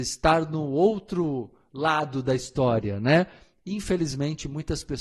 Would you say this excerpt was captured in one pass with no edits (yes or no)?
yes